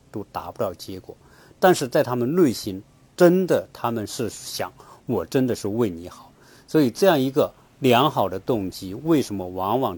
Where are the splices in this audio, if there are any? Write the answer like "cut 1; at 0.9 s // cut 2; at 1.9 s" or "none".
none